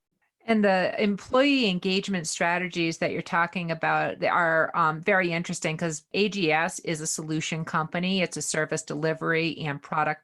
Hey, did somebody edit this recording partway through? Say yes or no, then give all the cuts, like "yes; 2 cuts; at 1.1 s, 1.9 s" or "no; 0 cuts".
no; 0 cuts